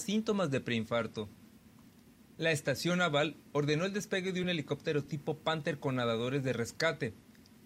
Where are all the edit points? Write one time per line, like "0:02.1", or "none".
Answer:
none